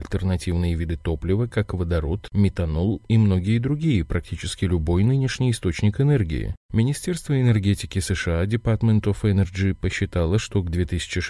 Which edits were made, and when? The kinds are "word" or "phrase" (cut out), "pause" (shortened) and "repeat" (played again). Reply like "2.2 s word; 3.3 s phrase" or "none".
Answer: none